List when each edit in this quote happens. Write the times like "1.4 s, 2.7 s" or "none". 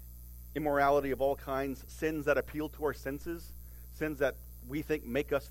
none